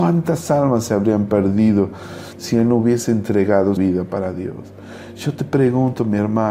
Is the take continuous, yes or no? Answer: no